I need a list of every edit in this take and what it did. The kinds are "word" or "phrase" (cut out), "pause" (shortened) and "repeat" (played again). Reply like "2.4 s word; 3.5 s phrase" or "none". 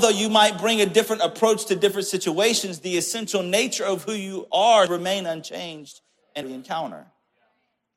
4.9 s word; 6.4 s word